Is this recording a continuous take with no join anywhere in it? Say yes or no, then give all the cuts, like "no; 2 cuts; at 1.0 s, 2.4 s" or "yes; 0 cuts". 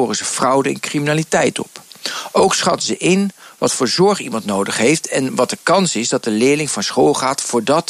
yes; 0 cuts